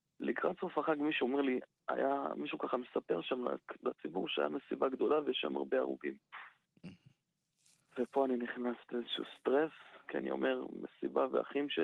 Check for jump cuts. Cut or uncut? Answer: uncut